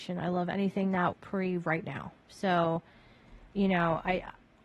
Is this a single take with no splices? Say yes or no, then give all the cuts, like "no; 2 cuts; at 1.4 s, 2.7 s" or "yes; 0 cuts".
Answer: no; 2 cuts; at 1.1 s, 2.2 s